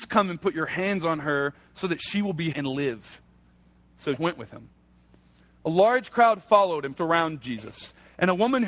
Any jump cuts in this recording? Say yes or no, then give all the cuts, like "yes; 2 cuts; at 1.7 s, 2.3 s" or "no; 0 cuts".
yes; 3 cuts; at 2.5 s, 4.2 s, 7.0 s